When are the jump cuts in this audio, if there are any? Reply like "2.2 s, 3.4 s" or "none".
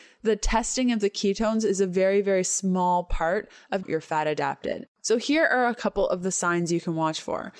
3.8 s, 4.9 s